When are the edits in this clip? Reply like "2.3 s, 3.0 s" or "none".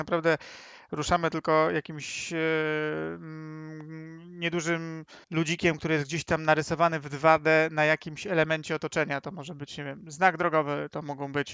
5.2 s